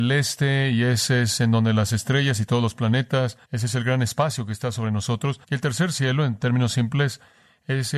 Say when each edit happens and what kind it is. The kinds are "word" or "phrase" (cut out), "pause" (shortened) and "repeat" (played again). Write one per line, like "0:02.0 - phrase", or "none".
0:03.4 - pause
0:05.4 - pause